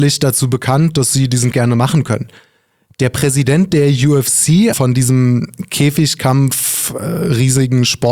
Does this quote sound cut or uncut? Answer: cut